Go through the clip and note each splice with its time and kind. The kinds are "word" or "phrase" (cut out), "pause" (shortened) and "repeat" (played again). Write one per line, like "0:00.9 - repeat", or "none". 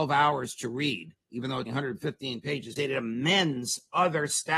0:01.7 - word
0:02.8 - word

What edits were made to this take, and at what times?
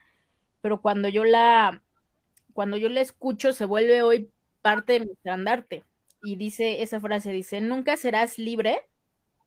none

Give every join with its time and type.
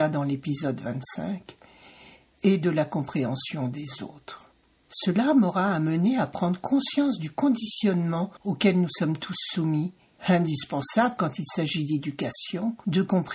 none

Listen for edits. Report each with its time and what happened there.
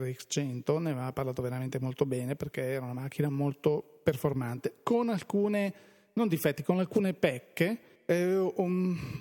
none

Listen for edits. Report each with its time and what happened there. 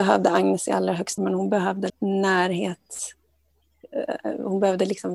0:01.2 - word
0:01.9 - word

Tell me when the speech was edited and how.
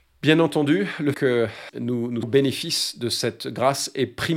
0:01.1 - word
0:01.7 - word
0:02.2 - word

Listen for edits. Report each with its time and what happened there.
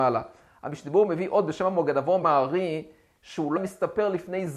0:02.2 - word
0:03.6 - word

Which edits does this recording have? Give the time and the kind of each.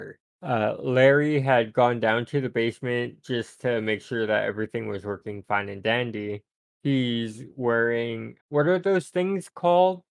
0:08.4 - word

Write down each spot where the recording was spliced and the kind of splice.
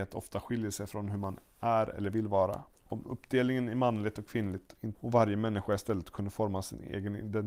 0:02.7 - pause
0:04.9 - word

